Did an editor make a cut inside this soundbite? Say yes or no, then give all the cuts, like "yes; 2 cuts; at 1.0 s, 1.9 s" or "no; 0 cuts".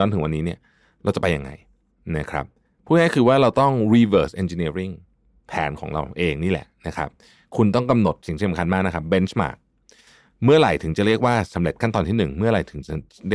no; 0 cuts